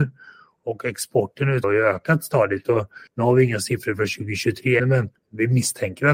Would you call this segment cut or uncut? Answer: cut